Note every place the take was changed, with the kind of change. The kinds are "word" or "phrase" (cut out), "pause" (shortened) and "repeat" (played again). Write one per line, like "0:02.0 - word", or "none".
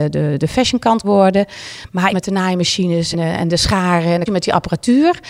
0:01.0 - word
0:02.1 - phrase
0:03.1 - word
0:04.3 - phrase